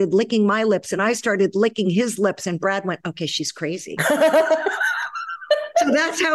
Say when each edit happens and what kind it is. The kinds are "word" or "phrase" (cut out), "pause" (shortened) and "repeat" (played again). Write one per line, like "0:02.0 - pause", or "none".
none